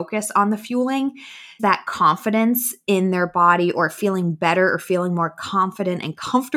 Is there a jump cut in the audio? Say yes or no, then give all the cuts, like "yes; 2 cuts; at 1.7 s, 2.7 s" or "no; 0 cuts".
yes; 1 cut; at 1.6 s